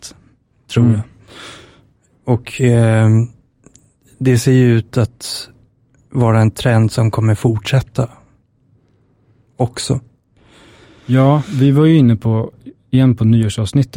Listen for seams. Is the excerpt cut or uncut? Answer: uncut